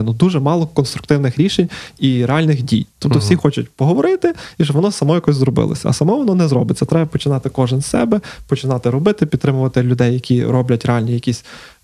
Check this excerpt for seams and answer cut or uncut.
uncut